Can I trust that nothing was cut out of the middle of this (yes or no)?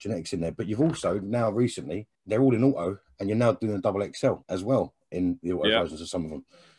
no